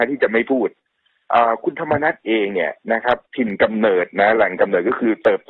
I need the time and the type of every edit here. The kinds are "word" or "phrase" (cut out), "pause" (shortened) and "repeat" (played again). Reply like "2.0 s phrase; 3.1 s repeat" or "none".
3.2 s pause